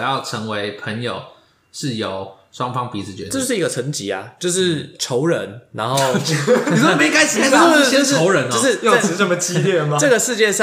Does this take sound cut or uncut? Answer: cut